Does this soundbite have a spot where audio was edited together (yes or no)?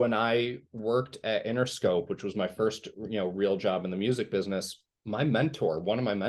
no